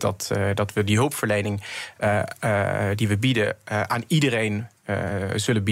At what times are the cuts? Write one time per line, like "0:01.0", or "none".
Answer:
none